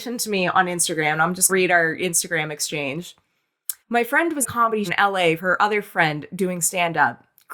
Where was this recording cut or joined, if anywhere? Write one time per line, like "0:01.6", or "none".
0:01.5
0:03.8
0:04.4
0:04.9
0:05.4

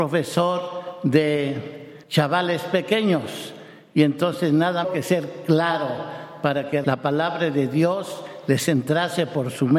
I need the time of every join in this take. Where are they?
0:02.0
0:04.8
0:06.8

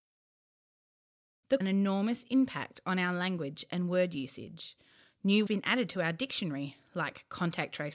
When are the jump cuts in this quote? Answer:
0:01.6
0:05.5

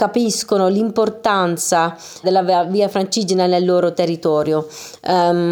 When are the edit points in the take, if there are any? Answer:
0:02.2

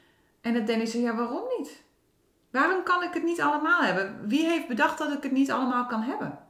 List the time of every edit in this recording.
none

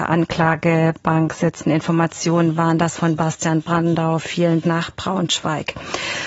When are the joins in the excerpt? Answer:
0:04.6

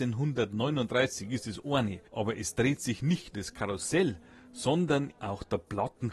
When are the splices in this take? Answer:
0:02.1
0:03.3
0:05.2

